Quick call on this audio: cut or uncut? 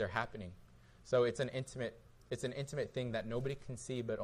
uncut